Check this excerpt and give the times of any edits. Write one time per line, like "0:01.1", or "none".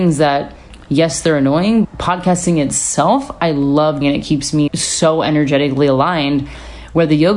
0:01.8
0:04.0
0:04.7